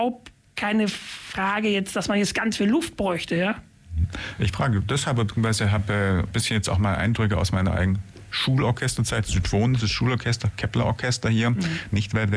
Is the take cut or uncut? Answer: uncut